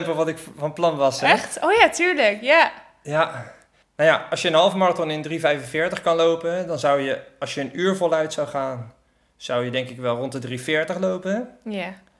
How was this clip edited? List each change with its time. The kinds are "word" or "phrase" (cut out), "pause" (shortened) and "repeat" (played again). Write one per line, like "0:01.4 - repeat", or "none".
none